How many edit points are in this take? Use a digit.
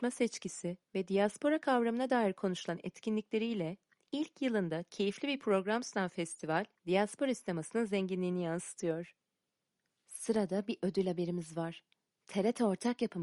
1